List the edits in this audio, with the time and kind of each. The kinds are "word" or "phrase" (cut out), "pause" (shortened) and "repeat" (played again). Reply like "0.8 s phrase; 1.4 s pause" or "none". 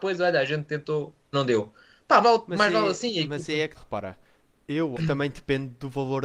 1.3 s word; 2.2 s word; 3.7 s word; 4.9 s word